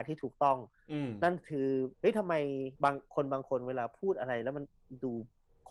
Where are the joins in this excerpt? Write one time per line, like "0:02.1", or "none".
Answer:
0:01.9
0:02.8